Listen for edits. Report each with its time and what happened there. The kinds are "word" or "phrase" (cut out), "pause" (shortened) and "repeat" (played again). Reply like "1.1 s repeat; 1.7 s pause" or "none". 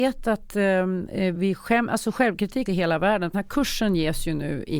1.3 s word; 2.7 s word; 3.3 s word